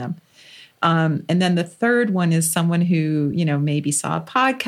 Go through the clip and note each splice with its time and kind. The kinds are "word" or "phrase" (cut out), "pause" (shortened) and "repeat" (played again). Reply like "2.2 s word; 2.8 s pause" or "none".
none